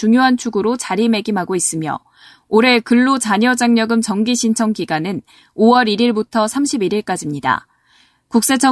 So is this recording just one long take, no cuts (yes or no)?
yes